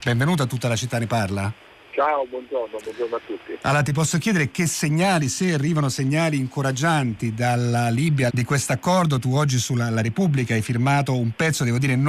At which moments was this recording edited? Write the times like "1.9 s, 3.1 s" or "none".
1.7 s, 8.3 s